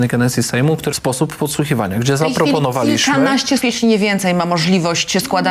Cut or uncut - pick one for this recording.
cut